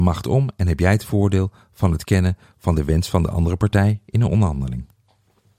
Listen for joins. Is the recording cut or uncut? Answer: uncut